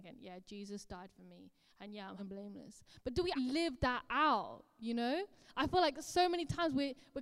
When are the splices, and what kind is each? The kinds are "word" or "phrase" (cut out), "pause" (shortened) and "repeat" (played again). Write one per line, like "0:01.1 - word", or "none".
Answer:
0:02.2 - word
0:03.4 - word